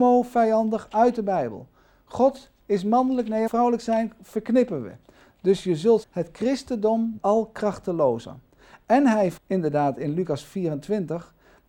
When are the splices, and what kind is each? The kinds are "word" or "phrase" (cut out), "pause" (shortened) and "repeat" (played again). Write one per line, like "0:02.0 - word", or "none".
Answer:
0:03.5 - word
0:06.0 - word
0:07.2 - word
0:09.4 - word